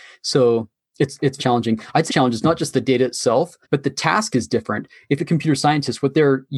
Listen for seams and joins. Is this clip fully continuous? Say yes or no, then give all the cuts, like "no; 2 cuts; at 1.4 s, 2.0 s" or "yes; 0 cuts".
no; 4 cuts; at 1.4 s, 2.1 s, 3.6 s, 5.2 s